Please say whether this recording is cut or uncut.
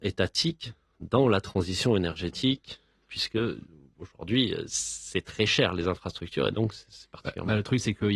uncut